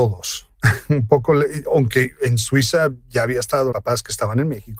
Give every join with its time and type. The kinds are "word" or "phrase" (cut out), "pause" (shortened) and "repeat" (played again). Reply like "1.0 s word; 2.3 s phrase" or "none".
3.7 s phrase